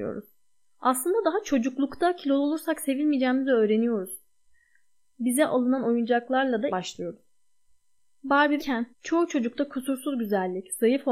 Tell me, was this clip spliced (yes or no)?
yes